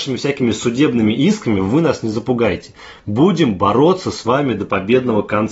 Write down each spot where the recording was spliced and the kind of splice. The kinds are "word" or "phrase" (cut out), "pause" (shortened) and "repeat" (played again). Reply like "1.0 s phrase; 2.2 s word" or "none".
none